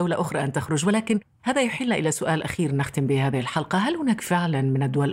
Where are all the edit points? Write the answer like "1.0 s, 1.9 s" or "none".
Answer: none

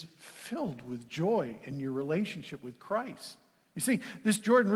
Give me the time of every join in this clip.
none

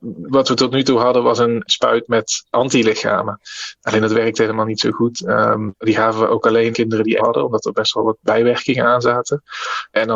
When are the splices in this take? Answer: 6.7 s, 7.2 s

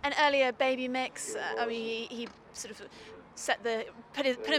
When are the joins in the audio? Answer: none

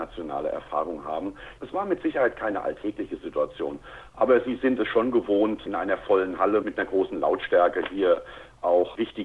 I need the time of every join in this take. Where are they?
none

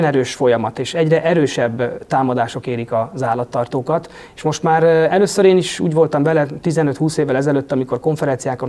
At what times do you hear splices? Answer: none

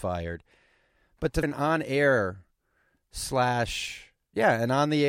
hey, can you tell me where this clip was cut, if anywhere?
1.4 s

